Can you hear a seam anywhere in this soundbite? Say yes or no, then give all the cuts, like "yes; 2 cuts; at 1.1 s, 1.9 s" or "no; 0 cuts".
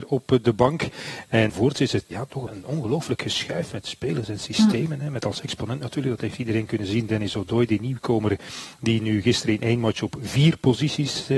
yes; 3 cuts; at 1.5 s, 2.1 s, 2.5 s